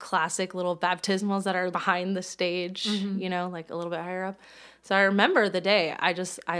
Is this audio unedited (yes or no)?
no